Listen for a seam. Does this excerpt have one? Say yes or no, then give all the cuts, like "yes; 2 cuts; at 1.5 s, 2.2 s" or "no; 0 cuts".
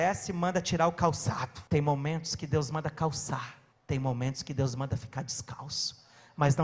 yes; 2 cuts; at 1.7 s, 3.7 s